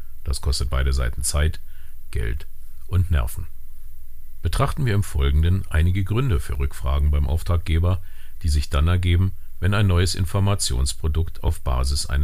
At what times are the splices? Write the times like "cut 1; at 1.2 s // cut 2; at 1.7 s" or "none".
none